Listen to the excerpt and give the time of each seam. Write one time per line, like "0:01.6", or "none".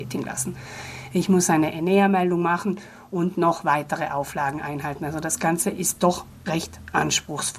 none